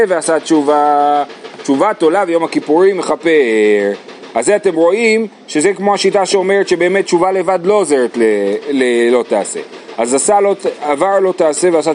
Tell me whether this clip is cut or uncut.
uncut